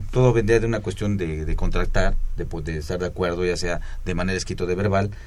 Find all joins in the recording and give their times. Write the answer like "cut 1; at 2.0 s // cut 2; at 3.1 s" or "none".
none

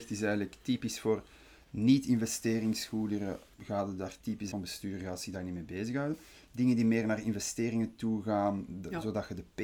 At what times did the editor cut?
cut 1; at 3.5 s // cut 2; at 4.5 s

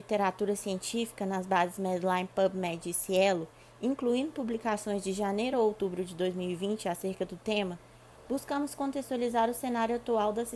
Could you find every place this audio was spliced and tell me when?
none

